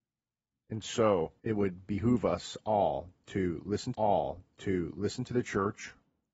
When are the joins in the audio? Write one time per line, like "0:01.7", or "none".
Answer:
0:01.4
0:03.9